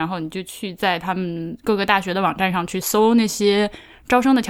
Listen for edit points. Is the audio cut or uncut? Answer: uncut